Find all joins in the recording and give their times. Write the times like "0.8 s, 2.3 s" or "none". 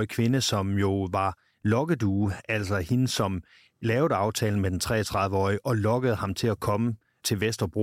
none